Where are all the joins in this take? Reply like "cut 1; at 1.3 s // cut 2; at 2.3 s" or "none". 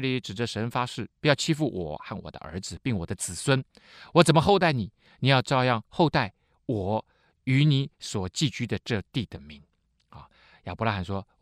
cut 1; at 1.1 s